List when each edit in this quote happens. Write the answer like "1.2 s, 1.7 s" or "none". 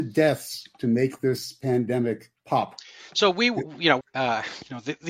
4.0 s